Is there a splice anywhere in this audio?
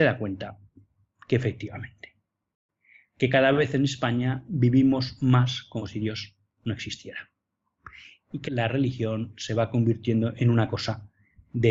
yes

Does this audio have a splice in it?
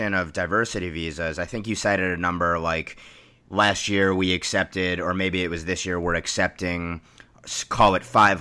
no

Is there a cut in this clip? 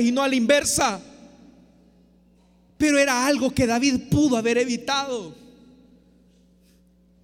no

